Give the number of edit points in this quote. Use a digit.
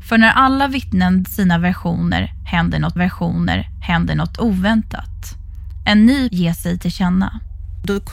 3